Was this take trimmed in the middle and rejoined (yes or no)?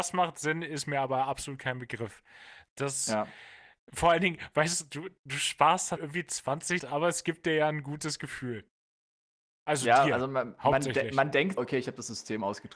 yes